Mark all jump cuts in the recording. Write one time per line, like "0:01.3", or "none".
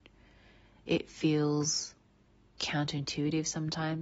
none